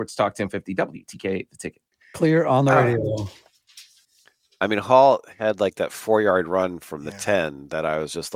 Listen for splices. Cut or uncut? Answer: uncut